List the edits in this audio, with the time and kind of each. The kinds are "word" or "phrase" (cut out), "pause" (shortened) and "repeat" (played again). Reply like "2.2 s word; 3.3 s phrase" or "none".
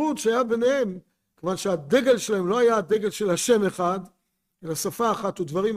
none